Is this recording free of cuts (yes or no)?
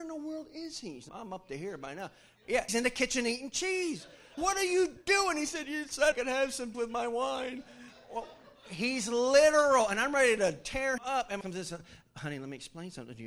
no